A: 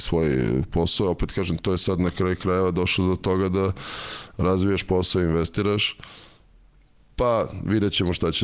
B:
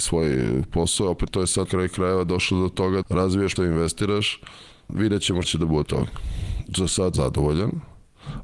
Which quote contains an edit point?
B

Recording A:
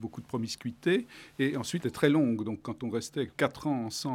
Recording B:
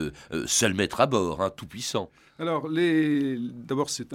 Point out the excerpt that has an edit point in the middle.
A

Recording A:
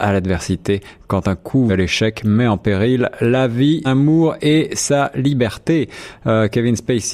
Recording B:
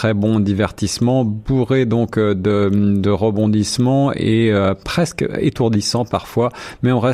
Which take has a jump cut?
A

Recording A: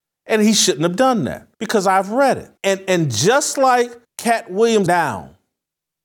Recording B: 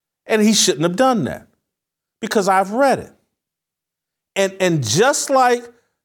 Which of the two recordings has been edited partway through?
A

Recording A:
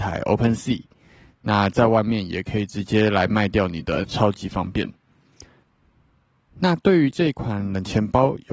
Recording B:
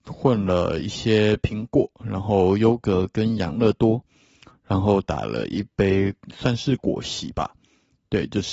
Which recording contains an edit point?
A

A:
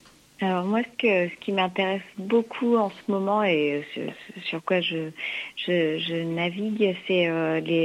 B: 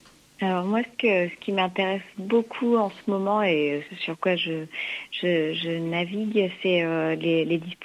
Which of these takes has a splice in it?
B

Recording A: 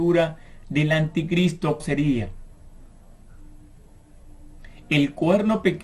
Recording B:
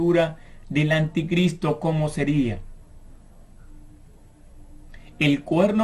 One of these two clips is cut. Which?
A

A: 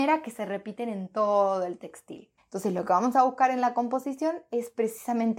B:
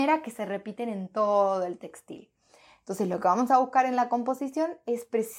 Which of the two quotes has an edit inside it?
A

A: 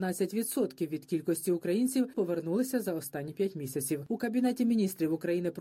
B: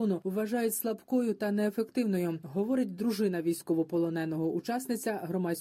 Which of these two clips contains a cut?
A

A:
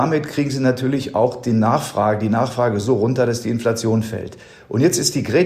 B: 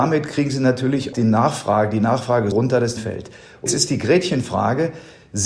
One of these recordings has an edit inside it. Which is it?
B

